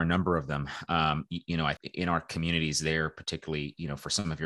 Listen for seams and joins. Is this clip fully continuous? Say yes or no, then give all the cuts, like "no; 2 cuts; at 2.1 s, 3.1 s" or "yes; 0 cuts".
no; 1 cut; at 1.8 s